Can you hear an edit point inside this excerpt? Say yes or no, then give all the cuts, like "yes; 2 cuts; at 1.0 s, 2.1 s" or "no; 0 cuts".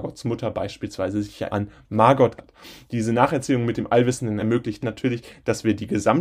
yes; 4 cuts; at 1.5 s, 2.4 s, 4.4 s, 4.8 s